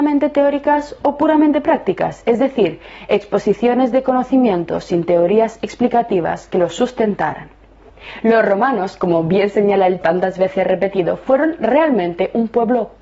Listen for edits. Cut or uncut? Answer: cut